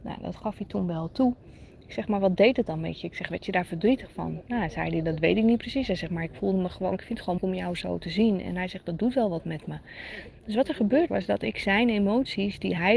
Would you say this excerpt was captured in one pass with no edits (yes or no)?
no